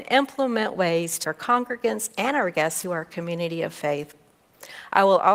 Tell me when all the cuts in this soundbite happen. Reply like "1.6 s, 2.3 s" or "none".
1.2 s, 2.8 s